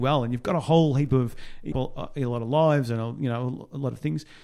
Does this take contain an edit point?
yes; 1 cut; at 1.7 s

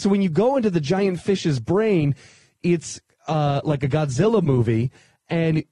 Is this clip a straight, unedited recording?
yes; 0 cuts

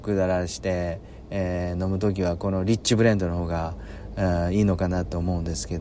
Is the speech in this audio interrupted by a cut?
no; 0 cuts

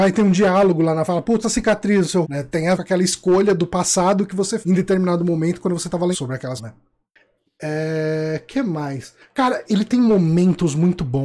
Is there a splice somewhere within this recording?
yes; 8 cuts; at 1.1 s, 1.4 s, 2.2 s, 2.7 s, 4.6 s, 6.1 s, 6.6 s, 9.7 s

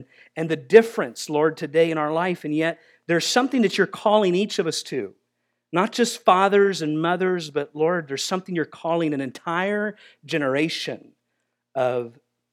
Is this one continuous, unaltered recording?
yes; 0 cuts

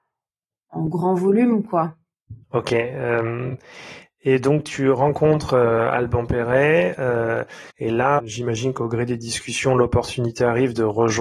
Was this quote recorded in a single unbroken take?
no; 3 cuts; at 2.4 s, 7.7 s, 8.2 s

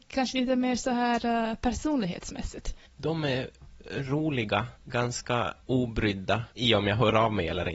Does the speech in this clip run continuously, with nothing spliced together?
no; 3 cuts; at 2.9 s, 4.8 s, 6.5 s

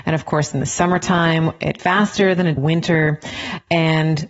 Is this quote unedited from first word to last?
no; 2 cuts; at 1.8 s, 2.6 s

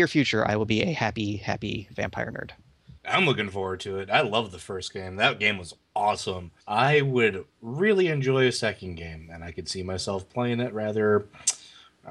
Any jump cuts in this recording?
yes; 2 cuts; at 3.0 s, 6.6 s

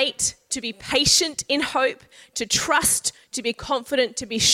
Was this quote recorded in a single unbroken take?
yes; 0 cuts

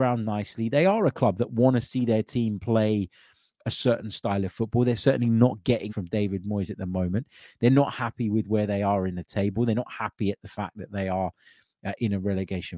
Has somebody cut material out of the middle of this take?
yes; 1 cut; at 5.9 s

